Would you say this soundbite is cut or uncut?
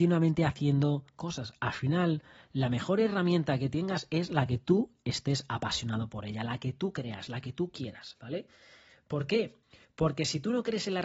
uncut